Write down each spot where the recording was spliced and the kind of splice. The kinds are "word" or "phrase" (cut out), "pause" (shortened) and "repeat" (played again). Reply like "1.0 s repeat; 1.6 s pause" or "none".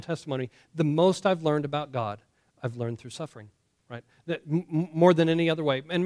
none